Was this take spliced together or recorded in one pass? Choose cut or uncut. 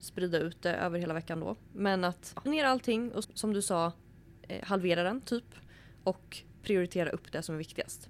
cut